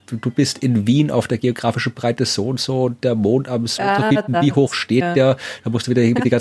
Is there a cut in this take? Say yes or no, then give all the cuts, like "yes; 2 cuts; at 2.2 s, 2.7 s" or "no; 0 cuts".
no; 0 cuts